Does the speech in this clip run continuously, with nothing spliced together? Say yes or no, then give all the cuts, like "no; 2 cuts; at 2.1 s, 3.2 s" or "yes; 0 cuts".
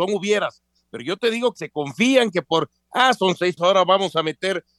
no; 2 cuts; at 1.6 s, 3.6 s